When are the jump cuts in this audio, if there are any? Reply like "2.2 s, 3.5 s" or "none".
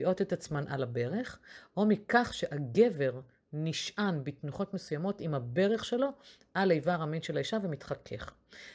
none